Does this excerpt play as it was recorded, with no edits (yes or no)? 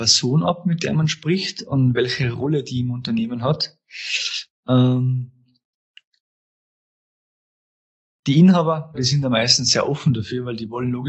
no